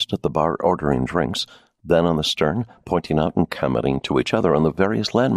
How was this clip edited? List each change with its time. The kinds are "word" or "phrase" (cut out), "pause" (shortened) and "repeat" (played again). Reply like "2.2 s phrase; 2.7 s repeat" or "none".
none